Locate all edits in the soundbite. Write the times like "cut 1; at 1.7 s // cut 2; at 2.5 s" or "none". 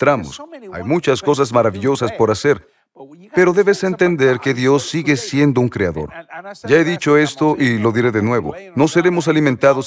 none